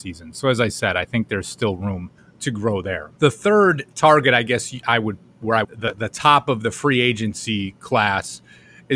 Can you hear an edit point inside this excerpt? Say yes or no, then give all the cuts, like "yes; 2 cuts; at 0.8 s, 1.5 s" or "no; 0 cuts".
yes; 3 cuts; at 2.2 s, 3.2 s, 5.6 s